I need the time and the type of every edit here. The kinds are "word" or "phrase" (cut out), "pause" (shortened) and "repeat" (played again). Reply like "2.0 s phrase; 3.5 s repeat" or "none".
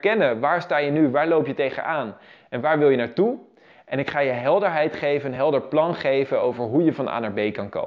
none

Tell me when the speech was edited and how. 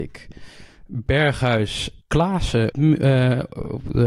2.0 s word; 2.7 s word

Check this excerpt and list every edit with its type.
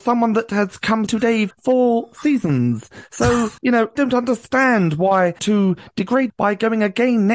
1.1 s word; 1.5 s phrase; 3.6 s pause; 4.0 s word; 5.4 s phrase; 6.3 s word

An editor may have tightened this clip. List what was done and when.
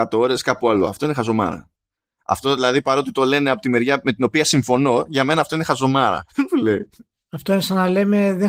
none

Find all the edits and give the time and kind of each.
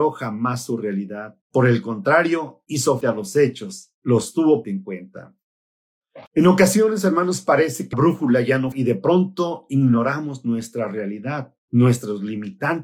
1.4 s pause; 3.0 s word; 4.0 s pause; 4.6 s word; 6.3 s pause; 7.9 s word; 8.7 s word; 11.6 s pause

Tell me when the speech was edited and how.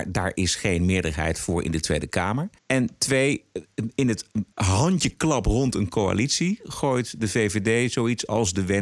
2.6 s pause; 4.5 s pause

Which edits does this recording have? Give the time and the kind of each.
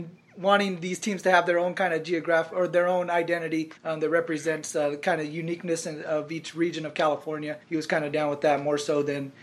3.8 s pause; 7.6 s pause

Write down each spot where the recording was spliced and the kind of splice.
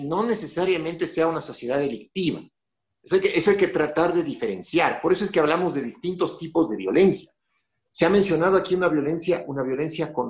none

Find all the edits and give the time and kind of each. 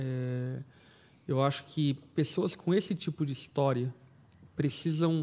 none

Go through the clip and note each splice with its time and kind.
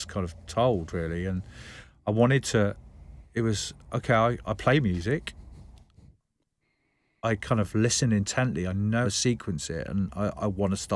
9.0 s word

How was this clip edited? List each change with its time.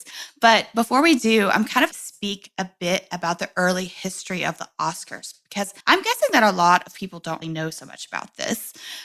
1.9 s phrase; 5.8 s pause; 7.4 s word

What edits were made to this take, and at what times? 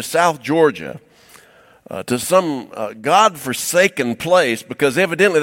none

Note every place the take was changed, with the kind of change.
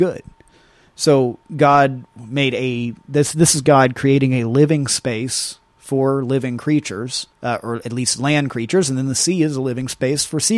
1.5 s pause; 7.3 s pause

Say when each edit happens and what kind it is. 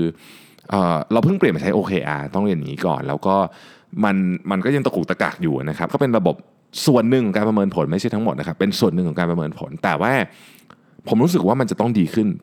5.9 s word

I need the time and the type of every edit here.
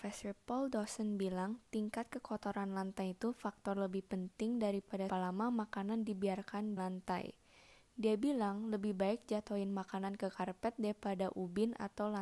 5.1 s word; 6.8 s word

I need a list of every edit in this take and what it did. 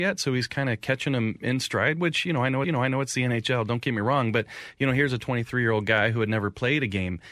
2.6 s repeat

